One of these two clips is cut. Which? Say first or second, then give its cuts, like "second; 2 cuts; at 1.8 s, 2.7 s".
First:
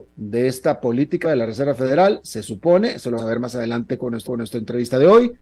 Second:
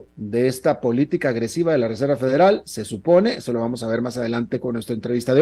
first; 3 cuts; at 1.2 s, 3.2 s, 4.2 s